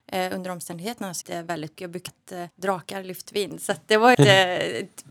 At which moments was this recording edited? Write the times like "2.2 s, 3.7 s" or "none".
1.2 s, 1.8 s, 2.1 s, 2.5 s, 3.3 s, 4.1 s